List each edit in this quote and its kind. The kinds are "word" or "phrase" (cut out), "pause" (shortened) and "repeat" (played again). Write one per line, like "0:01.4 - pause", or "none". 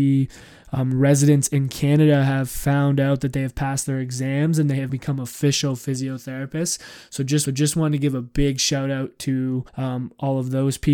0:04.9 - word
0:07.5 - repeat
0:09.7 - pause